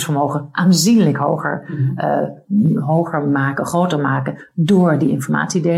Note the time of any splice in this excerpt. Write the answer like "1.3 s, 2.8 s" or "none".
none